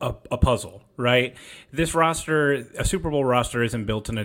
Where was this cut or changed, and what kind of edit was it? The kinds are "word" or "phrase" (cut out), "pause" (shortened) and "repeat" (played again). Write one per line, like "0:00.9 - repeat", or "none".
none